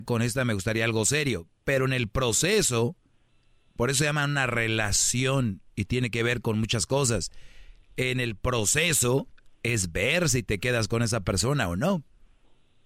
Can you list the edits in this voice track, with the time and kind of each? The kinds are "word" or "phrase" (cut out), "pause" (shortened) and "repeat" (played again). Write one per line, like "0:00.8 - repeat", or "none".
none